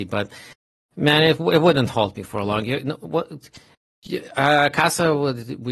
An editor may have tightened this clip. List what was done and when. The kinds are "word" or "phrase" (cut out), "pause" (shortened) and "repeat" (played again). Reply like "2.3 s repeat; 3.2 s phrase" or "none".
none